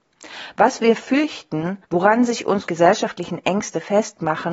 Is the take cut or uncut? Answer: cut